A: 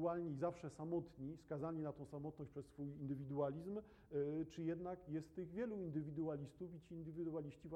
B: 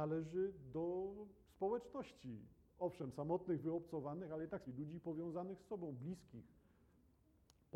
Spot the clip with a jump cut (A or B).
B